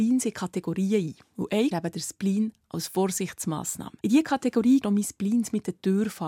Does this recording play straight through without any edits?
no; 3 cuts; at 1.7 s, 4.0 s, 4.8 s

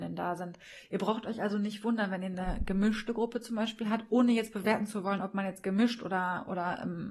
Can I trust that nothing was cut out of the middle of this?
yes; 0 cuts

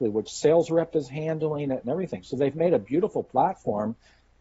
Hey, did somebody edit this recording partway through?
no; 0 cuts

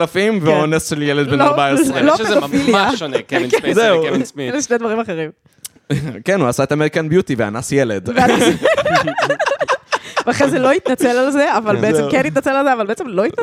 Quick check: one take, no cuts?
yes; 0 cuts

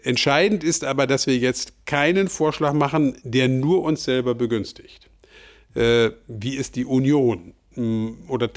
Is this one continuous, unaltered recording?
yes; 0 cuts

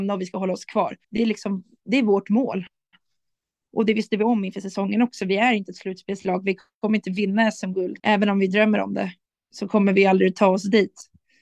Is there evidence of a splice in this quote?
yes; 3 cuts; at 1.0 s, 8.0 s, 9.3 s

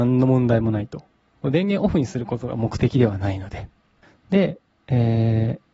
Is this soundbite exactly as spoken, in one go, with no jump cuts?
yes; 0 cuts

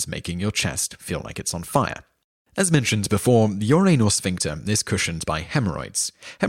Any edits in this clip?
no; 0 cuts

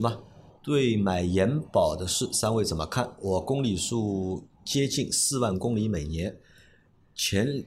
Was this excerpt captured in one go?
yes; 0 cuts

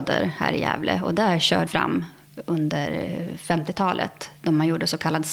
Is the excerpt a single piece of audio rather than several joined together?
no; 1 cut; at 1.7 s

